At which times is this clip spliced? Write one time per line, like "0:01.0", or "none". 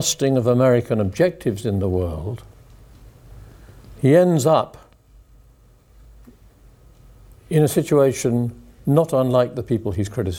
none